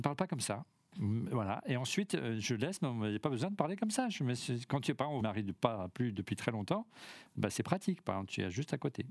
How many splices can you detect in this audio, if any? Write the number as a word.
one